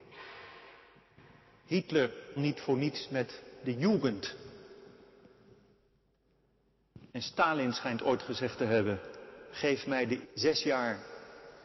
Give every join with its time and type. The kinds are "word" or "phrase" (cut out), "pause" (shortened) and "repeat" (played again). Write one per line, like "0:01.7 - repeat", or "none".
0:02.4 - word
0:07.1 - pause
0:10.2 - word

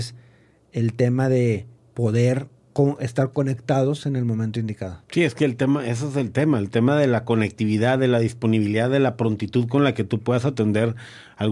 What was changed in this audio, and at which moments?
0:05.0 - pause

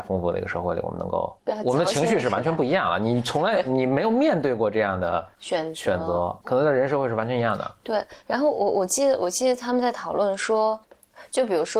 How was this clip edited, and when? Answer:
0:06.4 - word

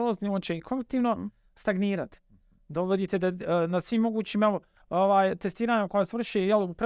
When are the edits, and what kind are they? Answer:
none

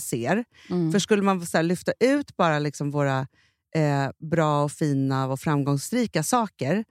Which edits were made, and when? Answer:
none

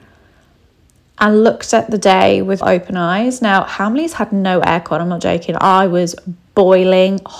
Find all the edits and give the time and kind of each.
0:02.6 - word

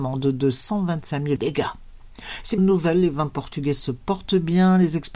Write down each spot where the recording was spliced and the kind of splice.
0:01.4 - phrase
0:02.6 - phrase

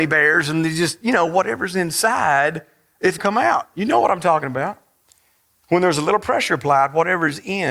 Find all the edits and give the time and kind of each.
0:03.2 - word

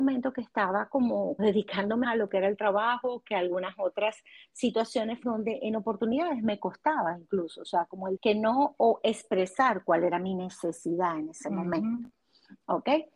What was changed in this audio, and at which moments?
0:01.4 - word
0:02.0 - word
0:05.2 - word
0:08.2 - word

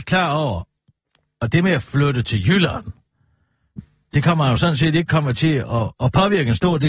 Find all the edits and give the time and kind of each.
none

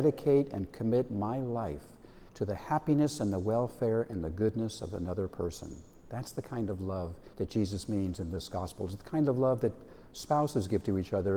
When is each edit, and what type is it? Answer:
0:02.3 - pause
0:07.3 - pause

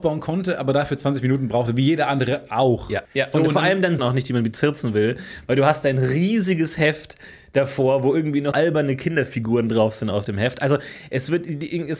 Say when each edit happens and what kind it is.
0:03.0 - pause
0:04.0 - phrase
0:08.5 - word

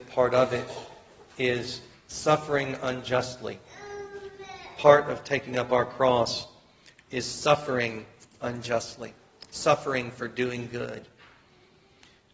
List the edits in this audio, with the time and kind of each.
none

